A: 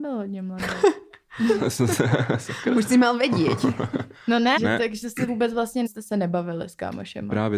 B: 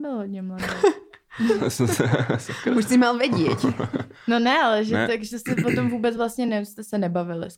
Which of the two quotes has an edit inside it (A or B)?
A